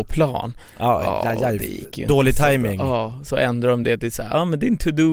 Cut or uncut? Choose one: uncut